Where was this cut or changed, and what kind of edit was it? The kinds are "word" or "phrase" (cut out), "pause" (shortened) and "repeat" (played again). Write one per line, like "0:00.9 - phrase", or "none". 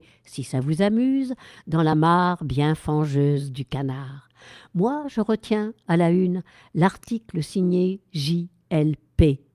none